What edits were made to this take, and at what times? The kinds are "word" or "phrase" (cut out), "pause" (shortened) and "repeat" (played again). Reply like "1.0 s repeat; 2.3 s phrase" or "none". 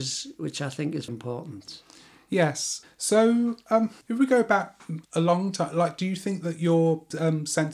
1.1 s word; 4.0 s pause; 5.0 s pause